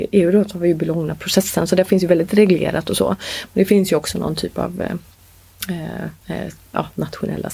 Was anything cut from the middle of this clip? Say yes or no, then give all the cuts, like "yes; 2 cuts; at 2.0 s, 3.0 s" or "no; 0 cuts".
yes; 1 cut; at 6.2 s